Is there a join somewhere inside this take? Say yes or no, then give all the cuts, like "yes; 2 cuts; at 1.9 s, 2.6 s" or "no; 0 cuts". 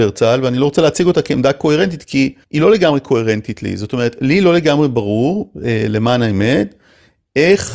yes; 1 cut; at 2.4 s